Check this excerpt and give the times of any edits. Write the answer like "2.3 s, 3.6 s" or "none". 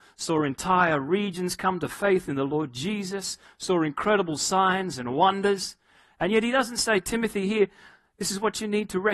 none